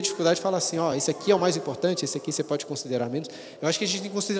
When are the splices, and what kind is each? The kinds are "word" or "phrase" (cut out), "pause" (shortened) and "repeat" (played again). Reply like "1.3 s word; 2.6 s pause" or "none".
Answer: none

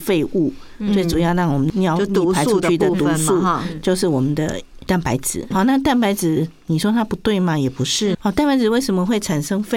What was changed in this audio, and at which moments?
5.5 s word; 8.1 s word

